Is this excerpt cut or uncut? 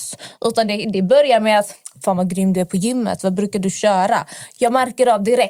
uncut